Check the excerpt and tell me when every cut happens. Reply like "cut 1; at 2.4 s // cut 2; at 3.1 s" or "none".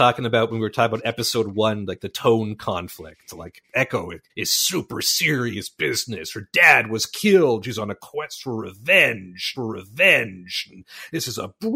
cut 1; at 4.3 s // cut 2; at 9.6 s